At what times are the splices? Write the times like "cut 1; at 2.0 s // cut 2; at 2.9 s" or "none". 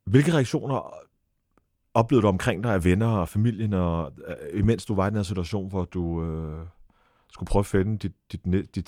none